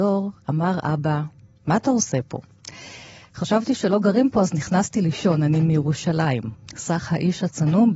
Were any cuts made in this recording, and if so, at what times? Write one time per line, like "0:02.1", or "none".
none